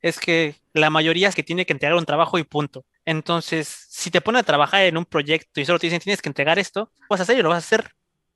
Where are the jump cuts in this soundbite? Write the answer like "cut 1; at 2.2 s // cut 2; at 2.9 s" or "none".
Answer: cut 1; at 1.3 s // cut 2; at 2.9 s // cut 3; at 7.1 s